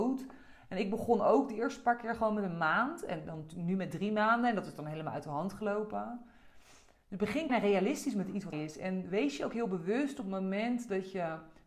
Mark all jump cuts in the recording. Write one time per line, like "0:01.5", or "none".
0:07.5
0:08.5